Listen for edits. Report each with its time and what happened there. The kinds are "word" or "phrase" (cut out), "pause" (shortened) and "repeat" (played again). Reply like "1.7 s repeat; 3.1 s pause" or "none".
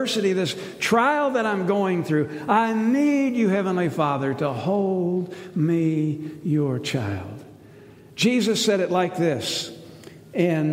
none